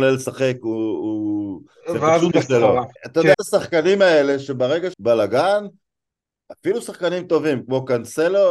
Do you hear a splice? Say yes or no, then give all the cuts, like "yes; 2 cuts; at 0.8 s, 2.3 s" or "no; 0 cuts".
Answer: yes; 4 cuts; at 2.3 s, 3.0 s, 3.3 s, 4.9 s